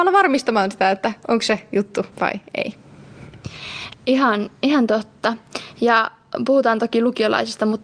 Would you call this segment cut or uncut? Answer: cut